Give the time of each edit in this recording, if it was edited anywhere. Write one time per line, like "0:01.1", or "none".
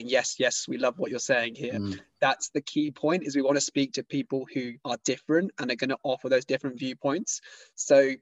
0:04.8

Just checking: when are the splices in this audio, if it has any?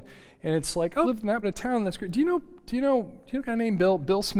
0:01.0
0:01.4

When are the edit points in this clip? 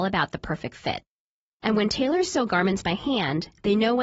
none

